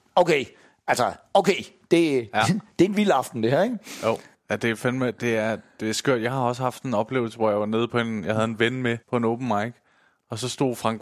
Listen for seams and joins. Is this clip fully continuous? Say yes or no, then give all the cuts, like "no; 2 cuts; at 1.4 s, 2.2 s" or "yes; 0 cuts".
no; 1 cut; at 9.0 s